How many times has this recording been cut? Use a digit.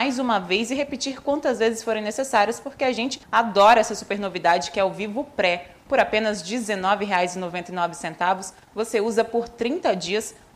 1